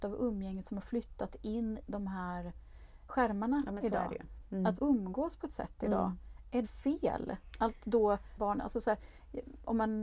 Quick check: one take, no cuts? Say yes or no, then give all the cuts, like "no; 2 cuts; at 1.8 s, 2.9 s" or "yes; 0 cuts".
no; 6 cuts; at 1.8 s, 3.1 s, 4.8 s, 5.5 s, 6.6 s, 8.4 s